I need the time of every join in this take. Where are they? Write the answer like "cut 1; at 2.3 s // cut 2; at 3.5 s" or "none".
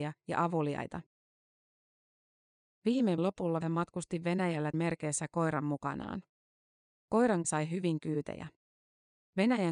cut 1; at 3.2 s // cut 2; at 3.6 s // cut 3; at 4.7 s // cut 4; at 7.4 s